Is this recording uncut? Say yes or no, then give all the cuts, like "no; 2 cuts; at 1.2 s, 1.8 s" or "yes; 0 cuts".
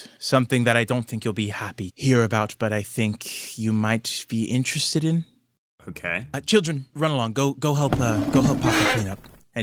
no; 2 cuts; at 1.9 s, 6.9 s